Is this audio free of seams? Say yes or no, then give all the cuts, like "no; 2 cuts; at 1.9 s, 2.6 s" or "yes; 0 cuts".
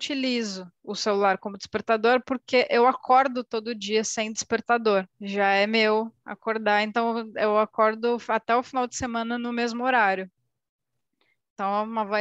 no; 1 cut; at 5.1 s